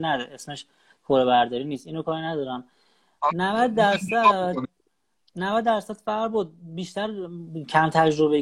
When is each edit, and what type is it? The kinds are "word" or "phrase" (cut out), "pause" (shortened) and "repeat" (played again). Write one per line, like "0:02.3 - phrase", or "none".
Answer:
none